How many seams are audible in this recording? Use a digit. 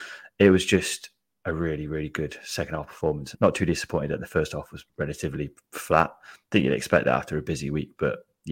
2